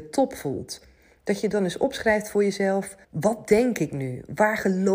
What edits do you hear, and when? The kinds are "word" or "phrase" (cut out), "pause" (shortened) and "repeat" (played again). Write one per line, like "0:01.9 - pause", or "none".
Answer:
0:03.0 - pause